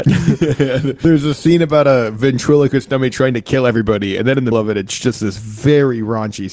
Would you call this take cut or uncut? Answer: cut